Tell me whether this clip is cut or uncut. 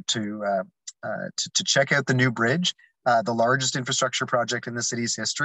uncut